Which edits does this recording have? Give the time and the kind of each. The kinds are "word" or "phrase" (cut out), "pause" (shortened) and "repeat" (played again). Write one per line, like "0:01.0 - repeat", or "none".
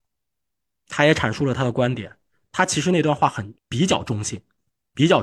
0:03.6 - pause